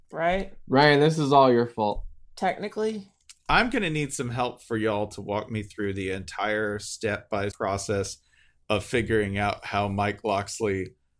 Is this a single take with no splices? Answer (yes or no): no